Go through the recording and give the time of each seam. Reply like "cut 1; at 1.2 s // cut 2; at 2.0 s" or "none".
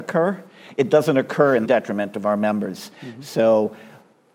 cut 1; at 1.6 s

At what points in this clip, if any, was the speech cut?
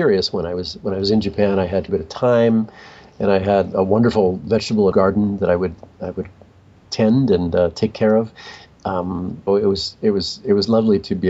cut 1; at 1.9 s // cut 2; at 3.7 s // cut 3; at 4.9 s // cut 4; at 9.5 s

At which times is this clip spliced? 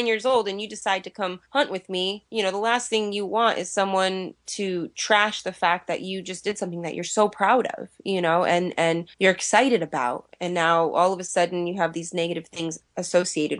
cut 1; at 1.5 s // cut 2; at 2.3 s // cut 3; at 9.1 s

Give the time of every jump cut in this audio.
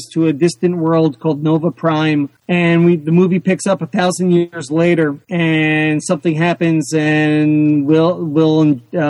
cut 1; at 2.4 s // cut 2; at 5.2 s

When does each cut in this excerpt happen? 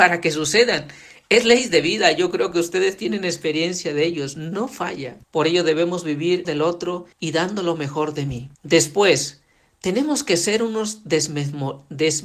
cut 1; at 5.2 s // cut 2; at 6.4 s // cut 3; at 7.1 s // cut 4; at 8.5 s

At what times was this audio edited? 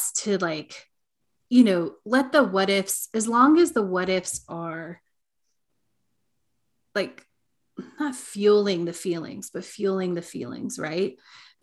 none

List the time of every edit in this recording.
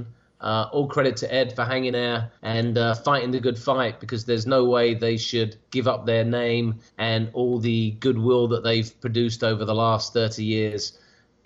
cut 1; at 1.9 s // cut 2; at 2.4 s // cut 3; at 6.9 s

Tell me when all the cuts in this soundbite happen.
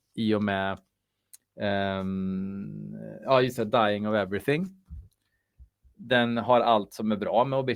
none

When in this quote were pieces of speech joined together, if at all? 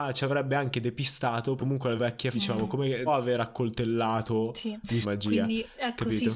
cut 1; at 1.6 s // cut 2; at 2.0 s // cut 3; at 2.3 s // cut 4; at 3.1 s // cut 5; at 5.0 s

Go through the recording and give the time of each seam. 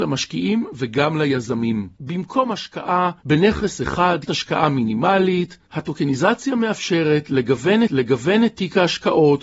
cut 1; at 1.9 s // cut 2; at 3.2 s // cut 3; at 4.3 s // cut 4; at 5.6 s // cut 5; at 7.9 s

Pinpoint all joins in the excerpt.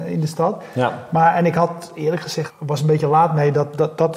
cut 1; at 2.5 s

